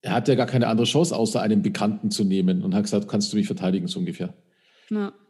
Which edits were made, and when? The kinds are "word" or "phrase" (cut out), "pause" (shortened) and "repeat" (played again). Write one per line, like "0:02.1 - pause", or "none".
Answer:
none